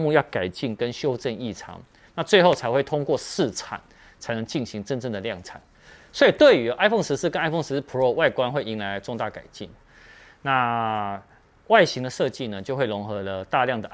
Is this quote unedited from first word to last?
yes; 0 cuts

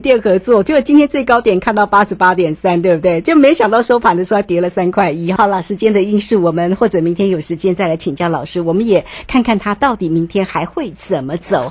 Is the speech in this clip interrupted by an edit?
yes; 1 cut; at 5.4 s

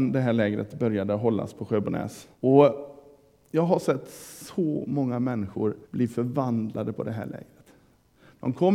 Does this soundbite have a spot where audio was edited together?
yes; 2 cuts; at 2.3 s, 5.8 s

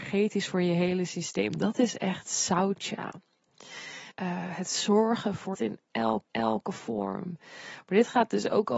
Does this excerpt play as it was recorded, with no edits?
no; 3 cuts; at 4.1 s, 5.5 s, 6.2 s

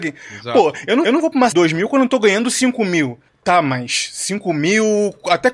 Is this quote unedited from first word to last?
no; 3 cuts; at 1.0 s, 1.5 s, 3.3 s

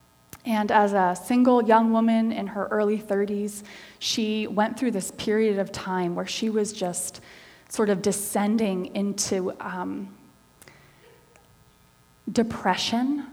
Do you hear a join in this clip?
no; 0 cuts

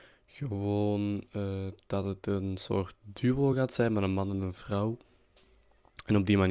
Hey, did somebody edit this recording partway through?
no; 0 cuts

